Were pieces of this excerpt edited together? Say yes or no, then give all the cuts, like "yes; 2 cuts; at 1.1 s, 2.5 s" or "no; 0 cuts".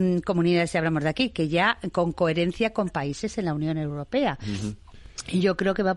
no; 0 cuts